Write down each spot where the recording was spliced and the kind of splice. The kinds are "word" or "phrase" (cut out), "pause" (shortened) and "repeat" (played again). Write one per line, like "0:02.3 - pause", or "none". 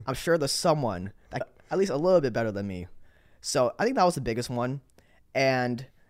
0:01.4 - phrase

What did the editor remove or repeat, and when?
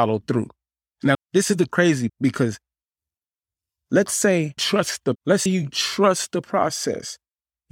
0:01.1 - word
0:02.1 - word
0:04.6 - word
0:05.1 - word
0:05.5 - word

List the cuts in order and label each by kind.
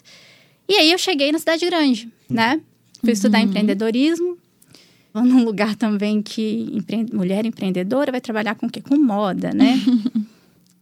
0:05.1 - phrase

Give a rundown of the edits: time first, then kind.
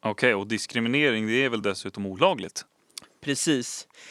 none

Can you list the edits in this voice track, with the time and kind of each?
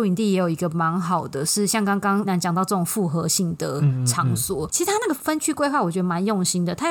0:02.2 - word

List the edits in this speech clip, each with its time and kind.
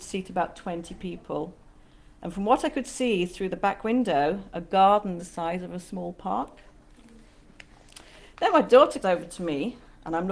0:05.2 - phrase
0:09.0 - word

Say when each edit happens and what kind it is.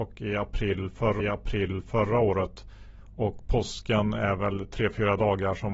0:01.2 - repeat

